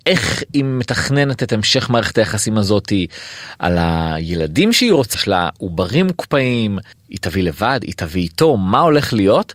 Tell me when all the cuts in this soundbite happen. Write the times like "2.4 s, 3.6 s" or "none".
5.1 s, 6.9 s